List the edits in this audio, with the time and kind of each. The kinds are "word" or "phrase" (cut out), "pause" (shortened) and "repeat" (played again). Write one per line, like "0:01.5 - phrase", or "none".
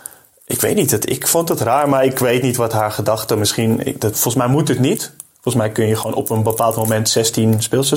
none